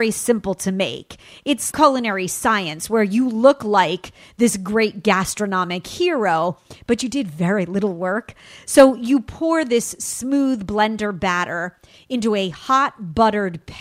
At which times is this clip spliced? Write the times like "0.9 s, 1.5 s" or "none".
1.7 s